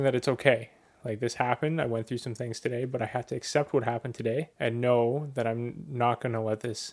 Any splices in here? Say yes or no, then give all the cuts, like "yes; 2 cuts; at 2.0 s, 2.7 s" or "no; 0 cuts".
yes; 1 cut; at 4.5 s